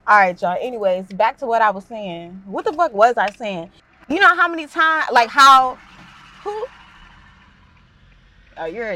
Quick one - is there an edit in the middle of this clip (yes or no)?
no